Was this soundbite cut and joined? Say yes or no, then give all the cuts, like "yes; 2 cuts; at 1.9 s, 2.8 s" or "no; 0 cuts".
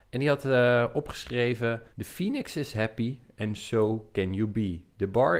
yes; 1 cut; at 1.9 s